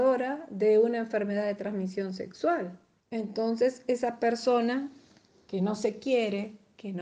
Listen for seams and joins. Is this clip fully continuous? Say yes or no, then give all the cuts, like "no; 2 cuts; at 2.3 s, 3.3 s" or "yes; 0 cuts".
yes; 0 cuts